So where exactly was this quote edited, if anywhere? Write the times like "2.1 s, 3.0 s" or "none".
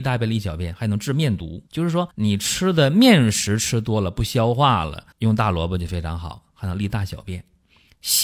1.7 s, 2.1 s, 5.1 s